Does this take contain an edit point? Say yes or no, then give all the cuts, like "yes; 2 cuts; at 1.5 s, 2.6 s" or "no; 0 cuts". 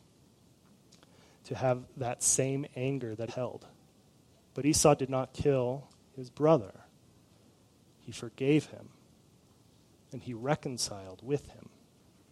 yes; 1 cut; at 3.3 s